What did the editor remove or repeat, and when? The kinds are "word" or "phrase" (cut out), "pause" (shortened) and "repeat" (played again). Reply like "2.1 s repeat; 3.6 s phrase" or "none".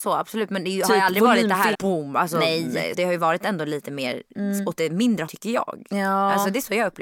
1.7 s word; 2.9 s word; 5.3 s word